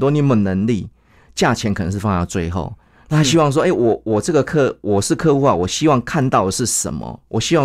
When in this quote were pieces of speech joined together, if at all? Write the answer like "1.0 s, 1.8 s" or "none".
none